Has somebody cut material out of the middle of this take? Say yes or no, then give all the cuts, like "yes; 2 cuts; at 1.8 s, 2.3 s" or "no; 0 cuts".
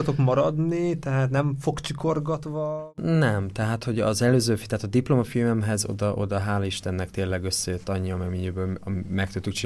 no; 0 cuts